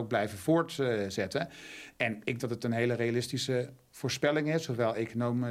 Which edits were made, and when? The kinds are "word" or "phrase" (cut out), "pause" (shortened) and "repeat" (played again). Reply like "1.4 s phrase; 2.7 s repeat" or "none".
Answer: 2.4 s word